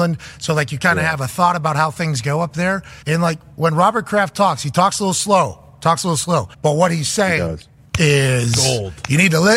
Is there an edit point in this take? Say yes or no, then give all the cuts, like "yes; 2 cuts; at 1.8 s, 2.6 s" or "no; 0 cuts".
yes; 2 cuts; at 3.0 s, 6.5 s